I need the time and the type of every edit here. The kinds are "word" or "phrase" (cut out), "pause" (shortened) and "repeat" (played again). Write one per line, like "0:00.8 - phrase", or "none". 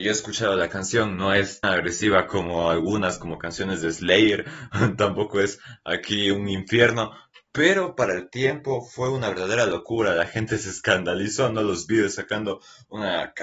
0:01.6 - word